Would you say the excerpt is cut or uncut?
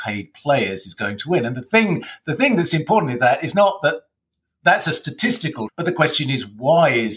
cut